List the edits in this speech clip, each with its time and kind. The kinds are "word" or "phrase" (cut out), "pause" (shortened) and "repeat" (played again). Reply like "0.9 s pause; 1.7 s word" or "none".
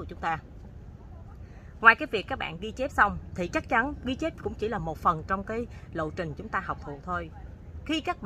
none